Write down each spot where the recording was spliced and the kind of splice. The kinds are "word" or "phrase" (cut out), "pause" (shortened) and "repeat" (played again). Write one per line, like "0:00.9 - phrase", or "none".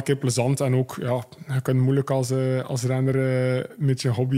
none